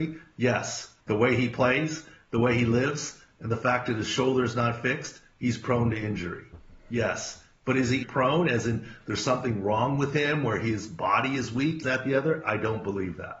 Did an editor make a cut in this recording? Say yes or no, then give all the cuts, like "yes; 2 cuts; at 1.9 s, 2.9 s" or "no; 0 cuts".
yes; 3 cuts; at 1.0 s, 8.0 s, 11.8 s